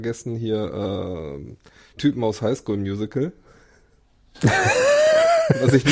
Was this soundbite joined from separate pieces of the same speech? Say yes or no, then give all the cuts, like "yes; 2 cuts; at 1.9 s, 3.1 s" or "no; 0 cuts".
yes; 1 cut; at 2.0 s